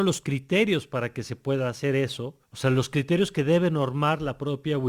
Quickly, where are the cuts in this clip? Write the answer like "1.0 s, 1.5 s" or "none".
2.4 s